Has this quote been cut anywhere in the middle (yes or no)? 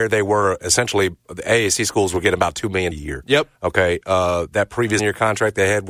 yes